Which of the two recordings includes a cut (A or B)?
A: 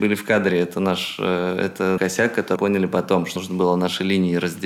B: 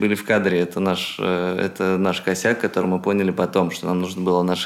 A